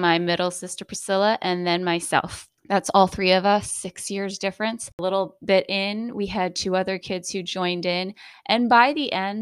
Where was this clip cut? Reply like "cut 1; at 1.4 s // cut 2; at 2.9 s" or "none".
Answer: cut 1; at 2.6 s